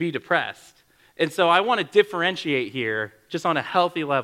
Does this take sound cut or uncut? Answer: uncut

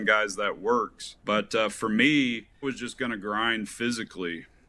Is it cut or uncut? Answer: cut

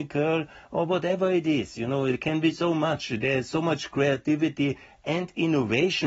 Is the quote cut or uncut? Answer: uncut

